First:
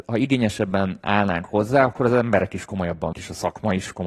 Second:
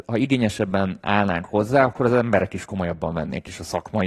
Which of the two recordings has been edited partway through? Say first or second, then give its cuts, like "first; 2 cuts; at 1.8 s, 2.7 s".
first; 1 cut; at 3.1 s